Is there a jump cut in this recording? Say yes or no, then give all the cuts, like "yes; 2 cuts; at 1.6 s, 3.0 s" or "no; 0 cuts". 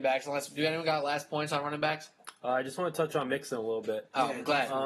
no; 0 cuts